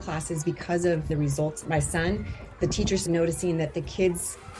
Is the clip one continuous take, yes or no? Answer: no